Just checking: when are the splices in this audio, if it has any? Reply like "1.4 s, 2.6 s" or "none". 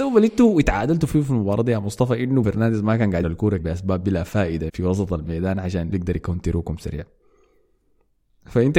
2.4 s, 3.2 s, 3.6 s, 4.7 s, 5.9 s